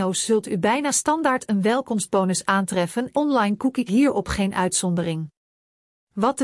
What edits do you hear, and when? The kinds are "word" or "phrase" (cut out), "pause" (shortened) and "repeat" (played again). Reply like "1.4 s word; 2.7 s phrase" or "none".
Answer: 3.1 s word; 3.9 s phrase